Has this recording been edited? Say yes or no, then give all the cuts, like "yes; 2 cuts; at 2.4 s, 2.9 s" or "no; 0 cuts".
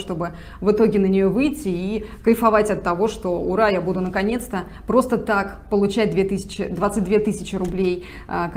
no; 0 cuts